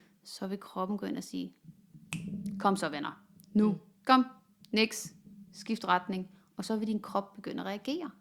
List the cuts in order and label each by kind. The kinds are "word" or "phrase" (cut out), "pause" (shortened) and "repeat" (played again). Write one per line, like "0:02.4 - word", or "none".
none